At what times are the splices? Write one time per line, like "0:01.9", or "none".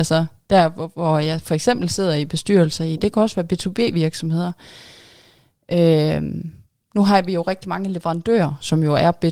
none

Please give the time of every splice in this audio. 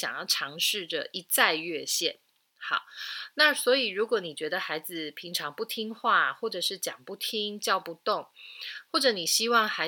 none

